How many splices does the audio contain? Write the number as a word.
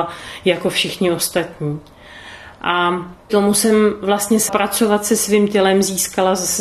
two